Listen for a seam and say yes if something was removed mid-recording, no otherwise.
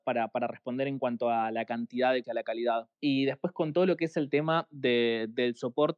yes